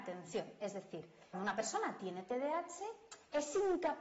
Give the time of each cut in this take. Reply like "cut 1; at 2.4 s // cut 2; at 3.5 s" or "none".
cut 1; at 1.3 s